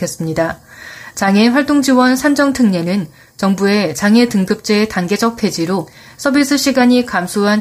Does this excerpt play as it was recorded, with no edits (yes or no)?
yes